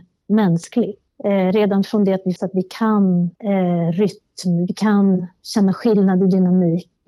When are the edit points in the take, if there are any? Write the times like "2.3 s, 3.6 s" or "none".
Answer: 2.4 s, 3.3 s

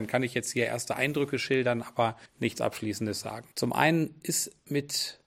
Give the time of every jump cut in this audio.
2.3 s, 3.5 s

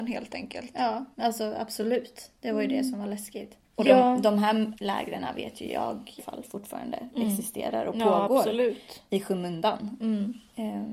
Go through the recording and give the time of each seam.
1.1 s, 3.6 s, 4.7 s, 6.2 s

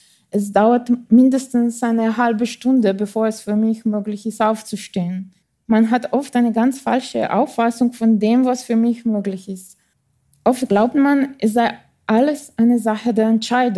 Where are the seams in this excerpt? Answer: 5.4 s, 9.9 s

